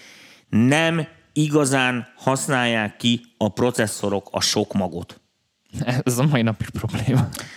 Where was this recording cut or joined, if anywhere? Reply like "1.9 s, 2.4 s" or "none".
none